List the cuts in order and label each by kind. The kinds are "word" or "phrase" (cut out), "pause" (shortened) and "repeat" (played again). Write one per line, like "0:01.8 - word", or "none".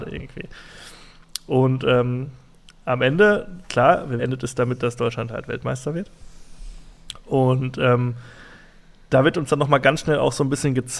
0:04.2 - phrase

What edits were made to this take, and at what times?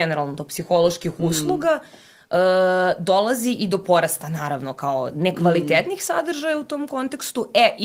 none

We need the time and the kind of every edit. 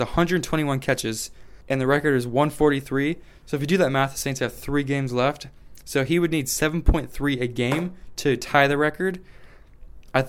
0:01.6 - pause

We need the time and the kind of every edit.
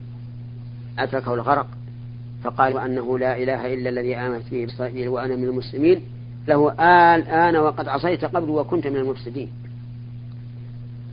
0:01.0 - word
0:02.7 - word
0:04.7 - word
0:06.5 - word

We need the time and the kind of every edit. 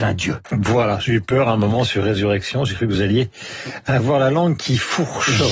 none

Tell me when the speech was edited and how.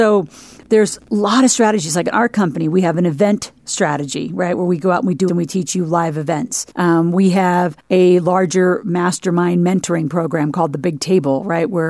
0:05.3 - word
0:06.7 - pause
0:07.8 - pause

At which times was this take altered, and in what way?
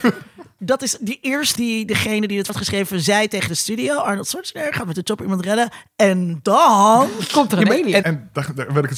0:01.6 - word
0:02.5 - word
0:08.0 - word

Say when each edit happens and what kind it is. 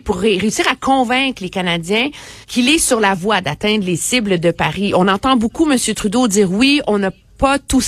0:02.4 - pause

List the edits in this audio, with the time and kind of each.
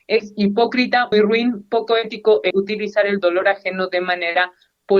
0:01.1 - word
0:02.5 - word

